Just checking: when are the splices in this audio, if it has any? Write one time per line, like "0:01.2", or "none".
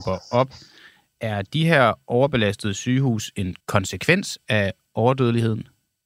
0:03.6